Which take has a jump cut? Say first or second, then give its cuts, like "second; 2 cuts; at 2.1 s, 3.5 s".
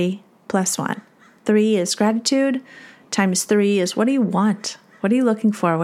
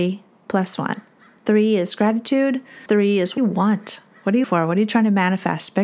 second; 3 cuts; at 2.9 s, 3.4 s, 4.4 s